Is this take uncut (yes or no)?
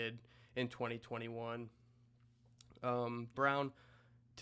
no